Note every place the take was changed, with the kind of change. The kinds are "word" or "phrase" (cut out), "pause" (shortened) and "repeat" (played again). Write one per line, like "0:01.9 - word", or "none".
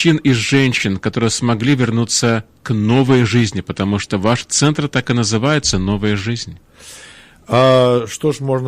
none